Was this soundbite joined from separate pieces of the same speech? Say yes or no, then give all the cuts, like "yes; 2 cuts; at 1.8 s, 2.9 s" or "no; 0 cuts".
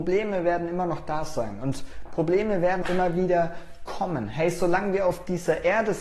yes; 1 cut; at 2.8 s